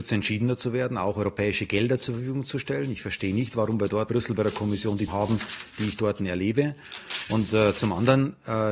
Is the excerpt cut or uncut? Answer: cut